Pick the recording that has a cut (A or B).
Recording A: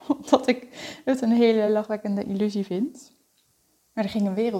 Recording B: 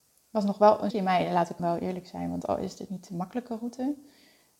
B